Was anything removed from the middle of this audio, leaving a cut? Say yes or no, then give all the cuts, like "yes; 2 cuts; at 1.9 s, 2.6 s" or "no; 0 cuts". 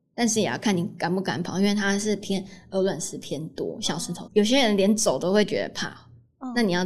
yes; 1 cut; at 4.3 s